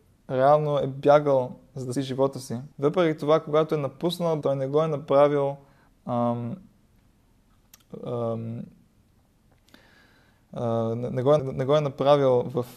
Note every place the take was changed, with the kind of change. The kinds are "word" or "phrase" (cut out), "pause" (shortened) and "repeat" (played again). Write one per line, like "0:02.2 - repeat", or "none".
0:01.9 - word
0:02.7 - pause
0:04.4 - word
0:05.9 - word
0:11.4 - word